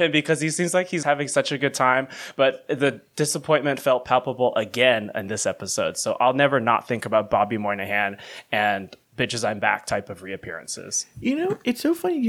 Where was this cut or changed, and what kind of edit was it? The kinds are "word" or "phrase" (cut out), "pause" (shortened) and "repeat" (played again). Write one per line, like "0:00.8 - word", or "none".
0:01.0 - word
0:09.0 - word